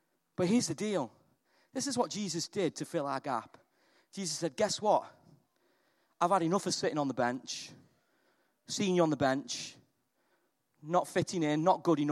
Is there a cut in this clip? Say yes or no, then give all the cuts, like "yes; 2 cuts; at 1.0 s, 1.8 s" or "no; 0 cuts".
no; 0 cuts